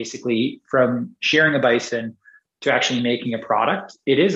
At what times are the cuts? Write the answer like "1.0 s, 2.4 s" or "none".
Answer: none